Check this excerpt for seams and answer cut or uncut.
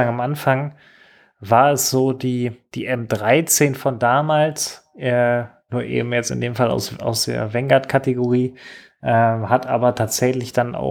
uncut